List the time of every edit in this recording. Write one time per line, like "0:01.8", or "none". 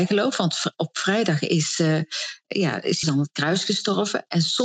0:03.0